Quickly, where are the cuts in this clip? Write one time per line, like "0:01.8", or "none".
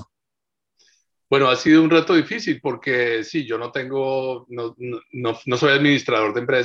none